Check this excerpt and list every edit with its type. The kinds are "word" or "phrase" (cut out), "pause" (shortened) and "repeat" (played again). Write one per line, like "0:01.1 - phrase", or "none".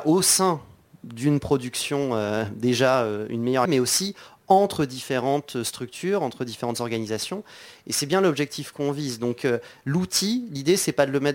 0:03.7 - word